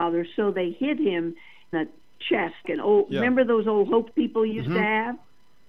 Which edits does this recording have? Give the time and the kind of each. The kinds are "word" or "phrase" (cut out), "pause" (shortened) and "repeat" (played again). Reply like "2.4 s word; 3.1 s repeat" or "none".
1.7 s word; 2.6 s word; 4.1 s word